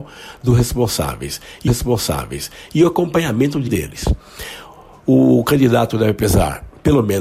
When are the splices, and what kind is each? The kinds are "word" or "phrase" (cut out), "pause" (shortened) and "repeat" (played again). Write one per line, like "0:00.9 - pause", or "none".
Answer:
0:01.7 - repeat
0:03.7 - word